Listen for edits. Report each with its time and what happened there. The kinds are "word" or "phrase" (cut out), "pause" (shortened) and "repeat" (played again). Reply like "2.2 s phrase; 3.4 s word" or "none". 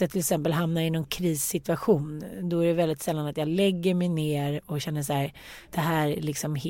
5.6 s pause